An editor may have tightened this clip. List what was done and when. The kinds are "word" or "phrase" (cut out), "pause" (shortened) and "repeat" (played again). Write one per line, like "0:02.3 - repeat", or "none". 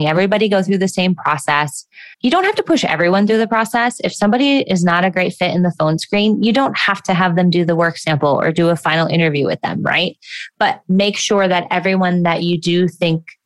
0:02.1 - pause